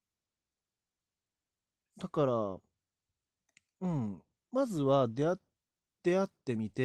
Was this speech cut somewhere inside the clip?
no; 0 cuts

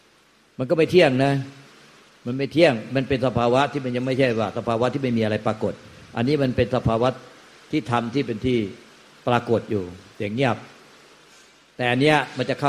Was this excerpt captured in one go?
yes; 0 cuts

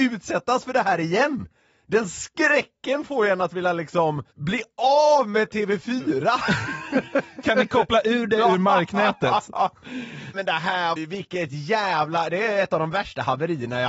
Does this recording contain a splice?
yes; 3 cuts; at 4.3 s, 10.3 s, 11.0 s

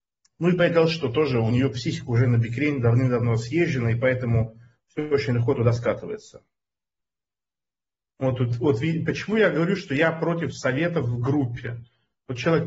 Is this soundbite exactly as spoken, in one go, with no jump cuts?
yes; 0 cuts

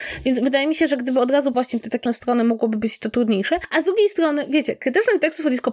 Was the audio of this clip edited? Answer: yes; 2 cuts; at 1.5 s, 2.1 s

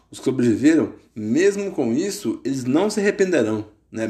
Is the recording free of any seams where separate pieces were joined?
yes; 0 cuts

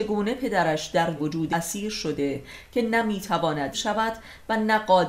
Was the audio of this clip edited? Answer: yes; 3 cuts; at 1.2 s, 1.5 s, 3.7 s

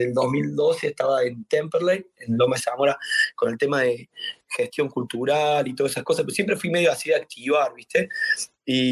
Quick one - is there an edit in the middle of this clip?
no; 0 cuts

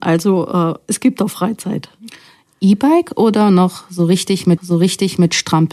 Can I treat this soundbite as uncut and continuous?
no; 1 cut; at 4.6 s

